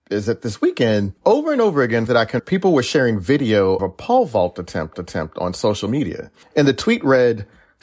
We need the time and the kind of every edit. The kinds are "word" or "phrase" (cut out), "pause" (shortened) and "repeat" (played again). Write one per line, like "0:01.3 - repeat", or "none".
0:01.2 - pause
0:02.1 - phrase
0:02.4 - word
0:03.8 - word
0:04.9 - repeat
0:06.4 - pause